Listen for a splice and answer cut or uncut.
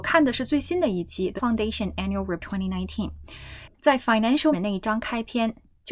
cut